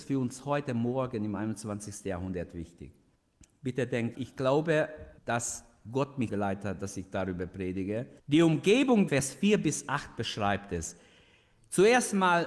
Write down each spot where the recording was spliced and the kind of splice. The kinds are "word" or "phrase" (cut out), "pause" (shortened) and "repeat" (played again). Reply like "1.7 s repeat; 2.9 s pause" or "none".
3.1 s pause; 4.1 s word; 5.2 s pause; 6.3 s word; 8.2 s pause; 9.1 s phrase